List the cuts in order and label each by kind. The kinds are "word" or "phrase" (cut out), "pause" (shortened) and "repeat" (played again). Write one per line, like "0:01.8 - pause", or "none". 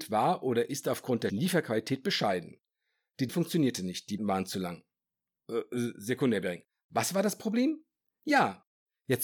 0:01.3 - word
0:03.3 - word
0:04.2 - word